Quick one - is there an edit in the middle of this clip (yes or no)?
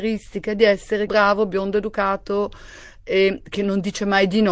yes